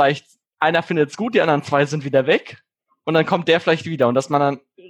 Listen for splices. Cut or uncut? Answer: uncut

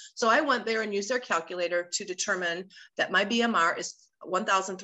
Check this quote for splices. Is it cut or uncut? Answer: uncut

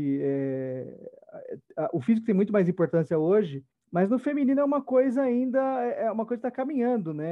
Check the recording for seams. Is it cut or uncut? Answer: cut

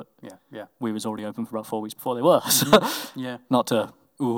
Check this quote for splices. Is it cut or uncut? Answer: uncut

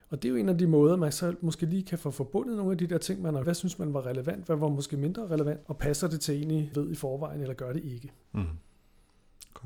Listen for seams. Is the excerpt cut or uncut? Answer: cut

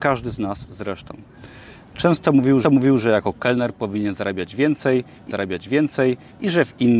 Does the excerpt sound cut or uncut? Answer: cut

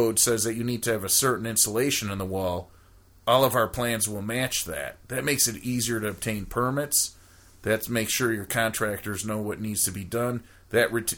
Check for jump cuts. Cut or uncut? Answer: uncut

